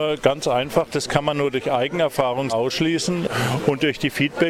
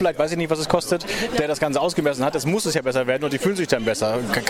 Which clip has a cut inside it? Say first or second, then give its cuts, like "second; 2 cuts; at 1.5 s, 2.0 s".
first; 1 cut; at 2.5 s